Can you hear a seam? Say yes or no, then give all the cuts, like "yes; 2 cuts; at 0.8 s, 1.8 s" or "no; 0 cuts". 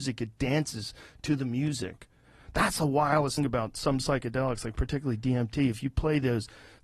yes; 1 cut; at 3.4 s